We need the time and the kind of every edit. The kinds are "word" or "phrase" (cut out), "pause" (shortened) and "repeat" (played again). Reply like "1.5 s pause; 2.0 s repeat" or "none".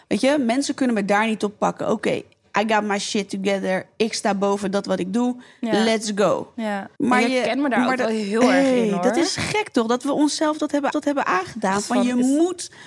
7.0 s pause; 10.9 s repeat